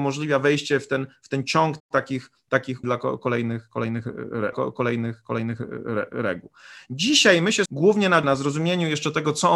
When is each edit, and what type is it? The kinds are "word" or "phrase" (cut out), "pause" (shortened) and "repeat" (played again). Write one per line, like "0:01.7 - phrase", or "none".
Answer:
0:01.8 - pause
0:02.8 - word
0:04.5 - repeat
0:07.7 - word
0:08.2 - phrase